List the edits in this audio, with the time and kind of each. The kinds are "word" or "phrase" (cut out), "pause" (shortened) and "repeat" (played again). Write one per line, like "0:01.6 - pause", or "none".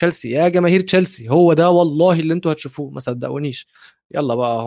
none